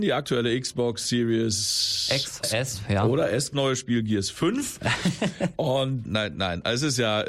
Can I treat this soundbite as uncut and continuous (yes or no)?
no